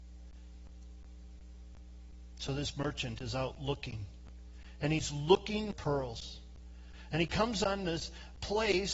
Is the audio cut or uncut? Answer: cut